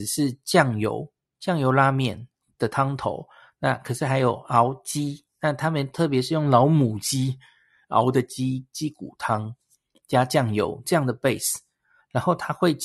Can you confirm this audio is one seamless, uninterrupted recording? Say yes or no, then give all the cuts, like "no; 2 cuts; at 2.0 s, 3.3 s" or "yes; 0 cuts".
yes; 0 cuts